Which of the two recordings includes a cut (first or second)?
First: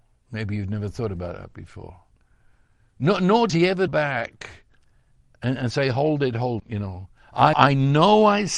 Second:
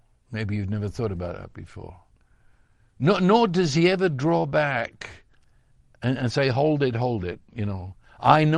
first